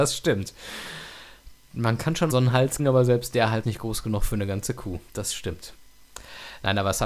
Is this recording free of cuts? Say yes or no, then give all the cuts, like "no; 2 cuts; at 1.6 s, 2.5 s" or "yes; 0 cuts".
no; 3 cuts; at 2.3 s, 2.8 s, 3.6 s